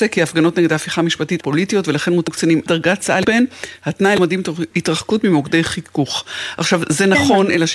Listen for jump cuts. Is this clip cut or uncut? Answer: cut